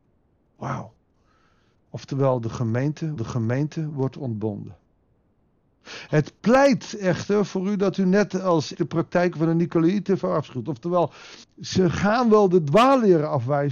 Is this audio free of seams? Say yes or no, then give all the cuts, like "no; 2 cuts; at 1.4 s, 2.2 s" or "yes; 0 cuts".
no; 4 cuts; at 3.2 s, 5.0 s, 8.7 s, 11.4 s